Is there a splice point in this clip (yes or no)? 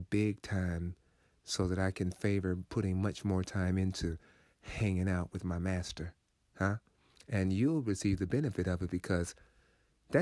no